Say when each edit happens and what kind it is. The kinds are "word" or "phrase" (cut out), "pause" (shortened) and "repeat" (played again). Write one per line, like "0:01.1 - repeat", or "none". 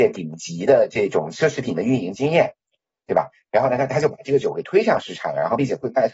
none